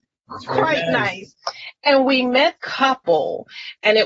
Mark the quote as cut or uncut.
cut